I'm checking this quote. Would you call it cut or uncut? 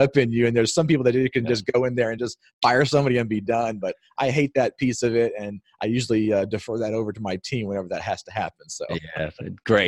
uncut